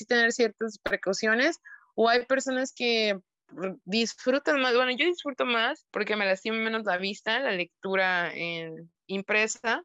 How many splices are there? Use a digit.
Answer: 1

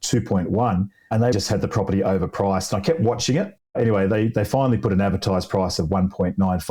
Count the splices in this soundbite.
1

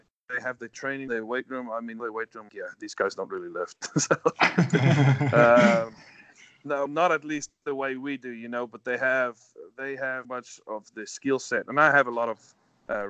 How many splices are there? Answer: 5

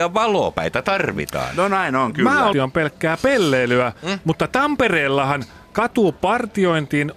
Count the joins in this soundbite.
1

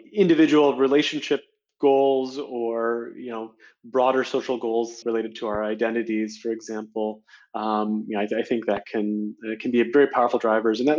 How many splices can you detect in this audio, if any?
1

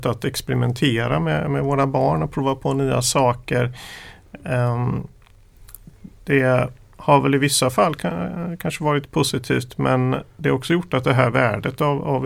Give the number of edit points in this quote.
1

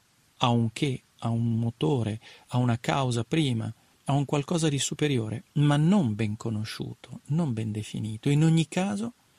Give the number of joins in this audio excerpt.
0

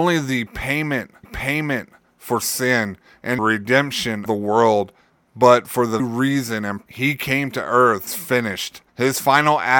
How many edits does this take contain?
8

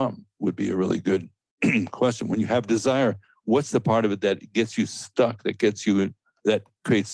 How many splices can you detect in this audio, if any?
0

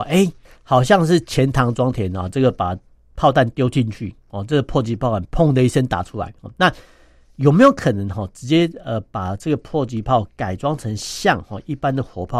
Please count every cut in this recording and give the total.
0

